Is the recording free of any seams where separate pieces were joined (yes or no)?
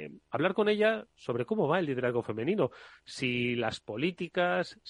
yes